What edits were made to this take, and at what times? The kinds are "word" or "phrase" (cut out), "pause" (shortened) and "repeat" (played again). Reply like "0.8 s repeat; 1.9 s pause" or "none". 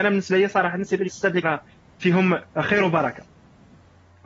1.1 s word; 1.4 s word; 2.5 s pause